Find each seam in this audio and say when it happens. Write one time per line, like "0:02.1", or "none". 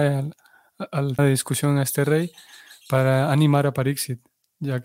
0:01.2